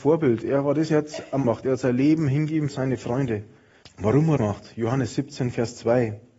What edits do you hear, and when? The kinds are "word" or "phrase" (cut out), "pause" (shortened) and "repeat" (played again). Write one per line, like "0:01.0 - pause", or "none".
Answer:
0:01.4 - word
0:02.7 - word
0:03.8 - pause
0:04.4 - word